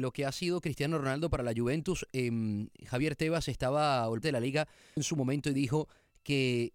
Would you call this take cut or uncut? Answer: cut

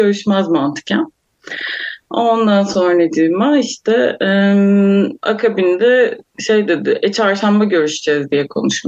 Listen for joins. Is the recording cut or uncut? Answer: cut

